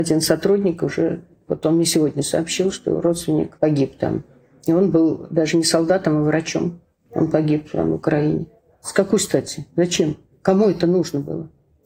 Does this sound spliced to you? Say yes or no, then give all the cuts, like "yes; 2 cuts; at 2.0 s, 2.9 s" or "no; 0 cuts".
no; 0 cuts